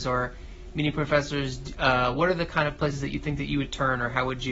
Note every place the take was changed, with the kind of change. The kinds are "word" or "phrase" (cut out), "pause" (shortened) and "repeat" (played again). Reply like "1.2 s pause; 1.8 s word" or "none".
none